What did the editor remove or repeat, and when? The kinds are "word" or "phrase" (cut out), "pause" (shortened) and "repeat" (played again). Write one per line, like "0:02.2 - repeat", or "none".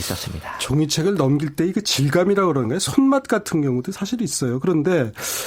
none